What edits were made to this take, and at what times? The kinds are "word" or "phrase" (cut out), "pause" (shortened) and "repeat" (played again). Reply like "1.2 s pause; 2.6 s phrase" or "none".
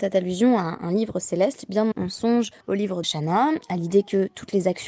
1.9 s word; 2.6 s pause; 3.0 s word